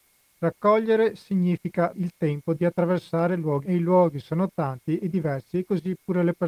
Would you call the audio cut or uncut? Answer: cut